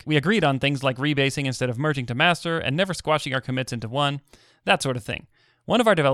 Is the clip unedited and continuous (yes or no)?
yes